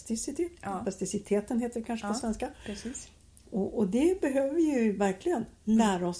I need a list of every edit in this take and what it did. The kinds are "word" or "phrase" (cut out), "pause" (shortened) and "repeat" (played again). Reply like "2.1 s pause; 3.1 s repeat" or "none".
none